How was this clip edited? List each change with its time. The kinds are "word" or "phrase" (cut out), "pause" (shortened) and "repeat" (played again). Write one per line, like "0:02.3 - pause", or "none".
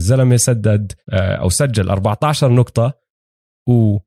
0:01.0 - pause

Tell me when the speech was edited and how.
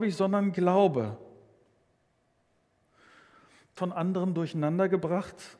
0:03.8 - phrase

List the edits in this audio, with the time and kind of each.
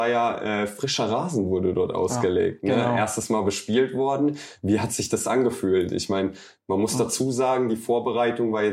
none

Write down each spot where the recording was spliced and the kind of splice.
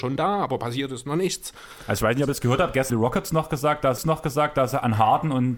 0:02.9 - word
0:04.0 - repeat

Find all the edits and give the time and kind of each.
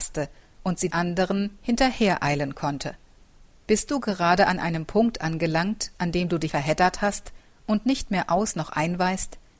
0:00.9 - word
0:03.4 - pause
0:06.5 - phrase

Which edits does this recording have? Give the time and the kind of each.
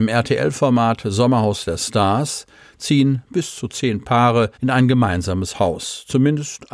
0:04.5 - pause

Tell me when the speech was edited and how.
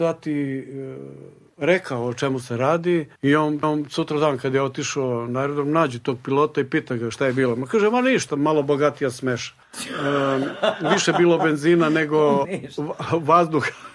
0:03.2 - pause
0:03.6 - repeat
0:09.6 - pause
0:12.4 - word

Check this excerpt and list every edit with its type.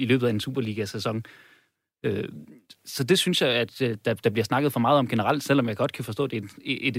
none

